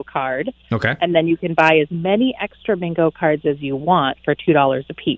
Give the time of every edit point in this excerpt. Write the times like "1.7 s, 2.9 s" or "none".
none